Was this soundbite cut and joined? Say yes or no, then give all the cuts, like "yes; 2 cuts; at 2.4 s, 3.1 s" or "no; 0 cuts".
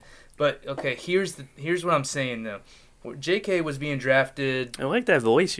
no; 0 cuts